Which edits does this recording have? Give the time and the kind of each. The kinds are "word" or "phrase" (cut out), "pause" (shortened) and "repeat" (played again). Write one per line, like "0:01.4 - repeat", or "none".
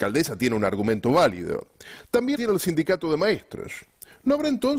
0:02.4 - word